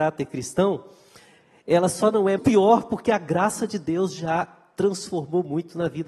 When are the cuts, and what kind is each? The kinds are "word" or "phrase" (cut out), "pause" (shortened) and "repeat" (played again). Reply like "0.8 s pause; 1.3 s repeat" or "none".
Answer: 2.4 s word